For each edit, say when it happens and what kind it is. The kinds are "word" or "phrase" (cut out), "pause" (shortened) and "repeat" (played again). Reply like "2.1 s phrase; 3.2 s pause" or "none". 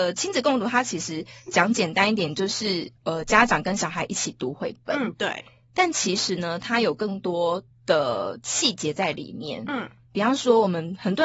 3.0 s pause